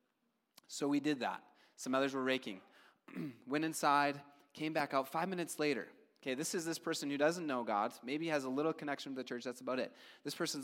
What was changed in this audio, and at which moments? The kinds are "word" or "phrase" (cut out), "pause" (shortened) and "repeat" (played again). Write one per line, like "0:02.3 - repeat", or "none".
none